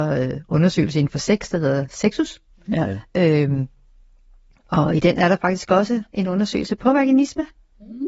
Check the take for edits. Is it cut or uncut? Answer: uncut